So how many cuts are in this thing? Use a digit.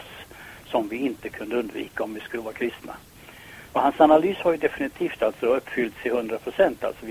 0